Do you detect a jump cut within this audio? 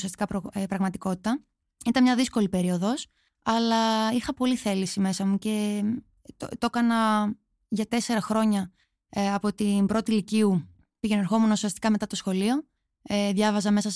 no; 0 cuts

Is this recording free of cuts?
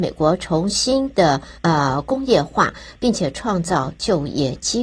no; 1 cut; at 1.6 s

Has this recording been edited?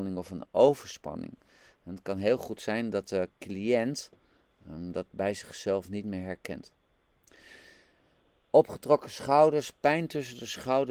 no; 0 cuts

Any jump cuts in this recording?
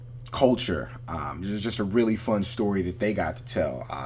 no; 0 cuts

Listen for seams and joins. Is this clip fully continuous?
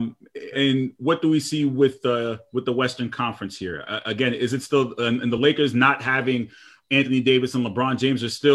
yes; 0 cuts

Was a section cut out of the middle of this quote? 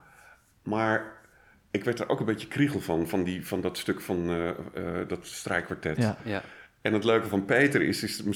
no; 0 cuts

